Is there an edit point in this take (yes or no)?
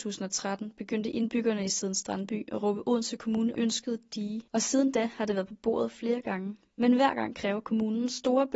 yes